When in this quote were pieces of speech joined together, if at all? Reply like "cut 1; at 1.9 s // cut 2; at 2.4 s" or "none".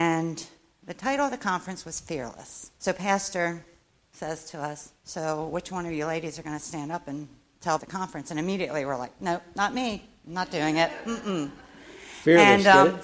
cut 1; at 2.7 s // cut 2; at 5.0 s // cut 3; at 7.8 s